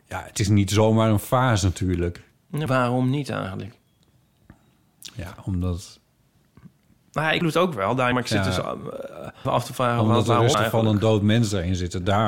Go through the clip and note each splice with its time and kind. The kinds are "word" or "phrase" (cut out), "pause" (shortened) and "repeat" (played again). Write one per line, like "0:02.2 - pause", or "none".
0:02.3 - pause
0:02.7 - word
0:07.4 - word
0:08.1 - phrase
0:09.4 - word
0:10.5 - word